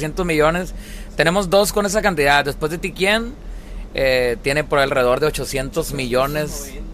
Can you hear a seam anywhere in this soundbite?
no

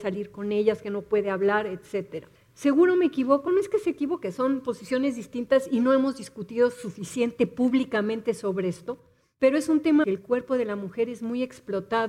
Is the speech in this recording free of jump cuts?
no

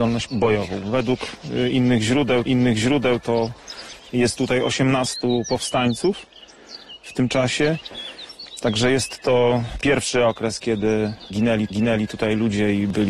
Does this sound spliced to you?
yes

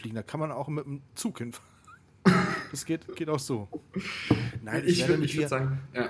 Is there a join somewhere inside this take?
yes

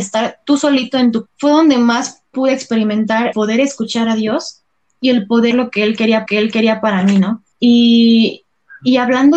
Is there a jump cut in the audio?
yes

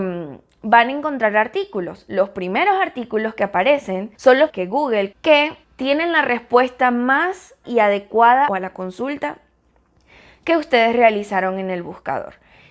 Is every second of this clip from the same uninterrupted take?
no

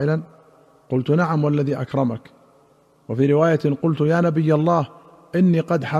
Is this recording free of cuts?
yes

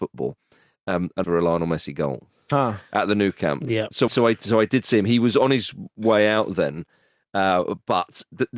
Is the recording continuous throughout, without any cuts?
no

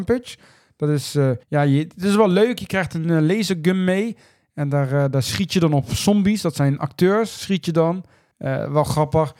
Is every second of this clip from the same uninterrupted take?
no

